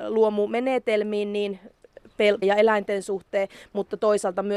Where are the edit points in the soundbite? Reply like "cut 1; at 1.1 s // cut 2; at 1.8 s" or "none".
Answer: cut 1; at 2.4 s